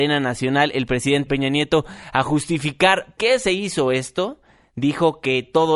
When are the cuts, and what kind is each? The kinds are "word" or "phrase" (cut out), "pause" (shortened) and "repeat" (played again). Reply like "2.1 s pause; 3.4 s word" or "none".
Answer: 1.3 s word; 3.2 s word

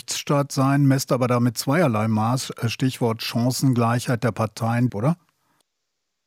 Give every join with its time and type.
4.9 s word

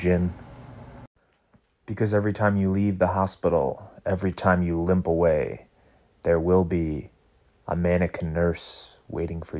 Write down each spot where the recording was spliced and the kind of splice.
none

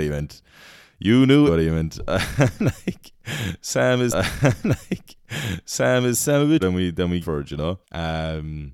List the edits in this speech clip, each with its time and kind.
1.5 s word; 4.1 s repeat; 6.6 s word; 7.2 s phrase; 7.8 s pause

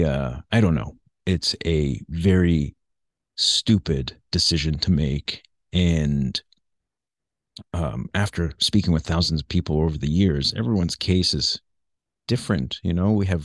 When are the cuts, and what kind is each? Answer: none

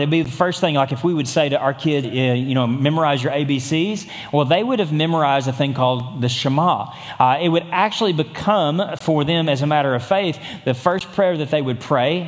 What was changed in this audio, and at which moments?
2.0 s word

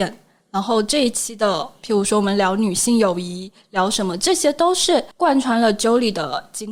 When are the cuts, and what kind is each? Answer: 5.1 s pause

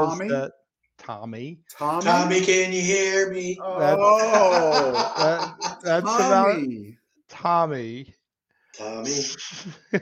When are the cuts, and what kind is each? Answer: none

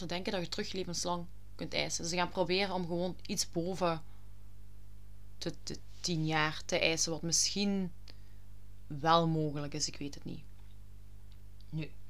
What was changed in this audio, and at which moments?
none

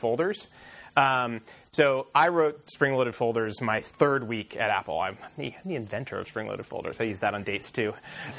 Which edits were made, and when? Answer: 2.7 s word

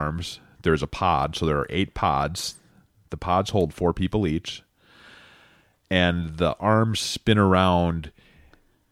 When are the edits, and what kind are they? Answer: none

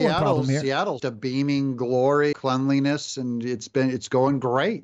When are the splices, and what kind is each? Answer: 1.0 s word; 2.3 s word

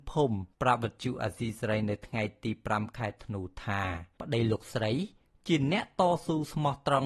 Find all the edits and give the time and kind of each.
none

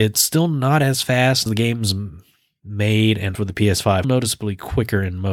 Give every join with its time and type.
1.5 s word; 3.3 s word; 4.0 s phrase

